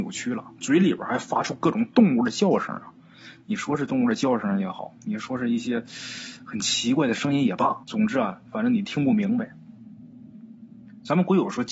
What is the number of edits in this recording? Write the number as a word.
one